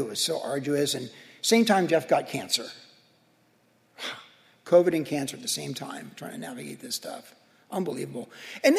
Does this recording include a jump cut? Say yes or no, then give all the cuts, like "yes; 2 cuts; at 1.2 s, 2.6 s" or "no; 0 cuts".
no; 0 cuts